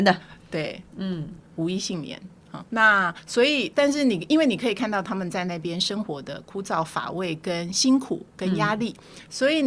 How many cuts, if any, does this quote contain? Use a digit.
3